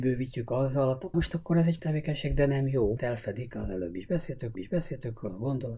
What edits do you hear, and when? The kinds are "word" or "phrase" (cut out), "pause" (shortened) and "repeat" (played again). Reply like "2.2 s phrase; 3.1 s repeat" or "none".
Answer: 1.1 s word; 1.8 s word; 3.0 s word; 4.5 s repeat